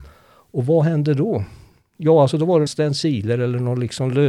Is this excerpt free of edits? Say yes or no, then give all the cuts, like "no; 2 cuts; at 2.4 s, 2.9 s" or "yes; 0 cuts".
no; 1 cut; at 2.7 s